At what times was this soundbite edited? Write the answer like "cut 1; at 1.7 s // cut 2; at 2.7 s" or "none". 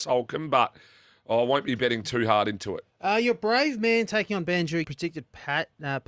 cut 1; at 2.9 s // cut 2; at 4.8 s